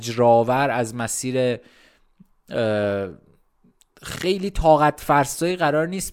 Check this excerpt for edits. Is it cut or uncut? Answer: uncut